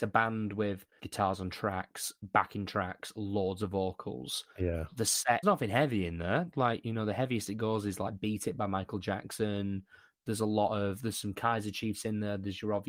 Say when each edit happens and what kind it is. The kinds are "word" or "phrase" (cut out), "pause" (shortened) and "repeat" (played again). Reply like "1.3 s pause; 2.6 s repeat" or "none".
1.0 s word; 4.5 s pause; 5.4 s phrase